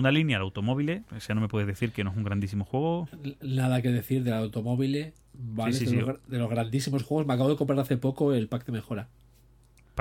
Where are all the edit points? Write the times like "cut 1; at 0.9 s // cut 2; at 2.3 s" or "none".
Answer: cut 1; at 1.1 s // cut 2; at 5.2 s